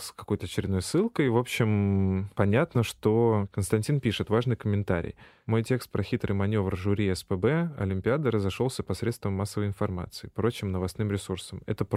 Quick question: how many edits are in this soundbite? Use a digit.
0